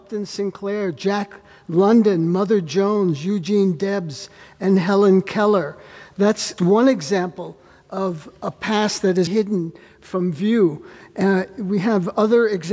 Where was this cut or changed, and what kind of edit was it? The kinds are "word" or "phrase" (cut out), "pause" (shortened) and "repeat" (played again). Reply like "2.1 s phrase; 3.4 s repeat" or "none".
6.6 s word; 9.3 s word